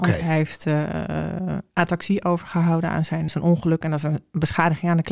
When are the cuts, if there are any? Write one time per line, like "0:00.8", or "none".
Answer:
0:03.3